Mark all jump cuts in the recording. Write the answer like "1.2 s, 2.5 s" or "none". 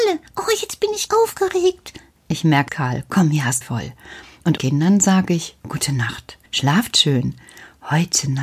1.1 s, 2.7 s, 3.6 s, 4.6 s, 5.6 s, 6.5 s